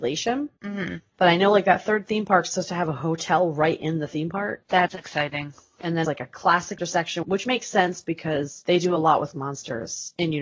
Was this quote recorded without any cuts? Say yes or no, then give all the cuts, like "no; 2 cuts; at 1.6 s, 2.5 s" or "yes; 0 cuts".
no; 4 cuts; at 6.0 s, 6.8 s, 7.2 s, 9.3 s